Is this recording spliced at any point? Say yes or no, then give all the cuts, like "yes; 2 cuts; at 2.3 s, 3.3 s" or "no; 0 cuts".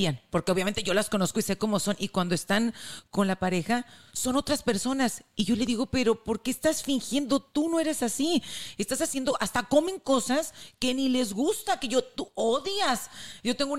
no; 0 cuts